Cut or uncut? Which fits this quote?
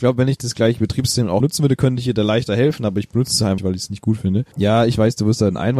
cut